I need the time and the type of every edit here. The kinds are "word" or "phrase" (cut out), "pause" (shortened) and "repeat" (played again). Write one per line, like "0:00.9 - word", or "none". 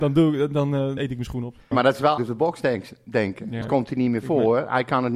0:01.0 - word
0:01.7 - word
0:02.2 - word
0:03.6 - word